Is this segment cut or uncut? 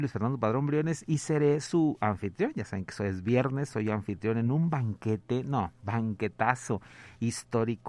uncut